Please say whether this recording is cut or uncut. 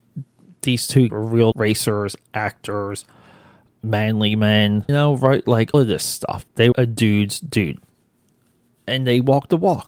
cut